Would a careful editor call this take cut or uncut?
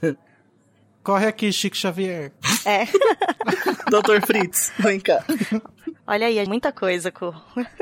cut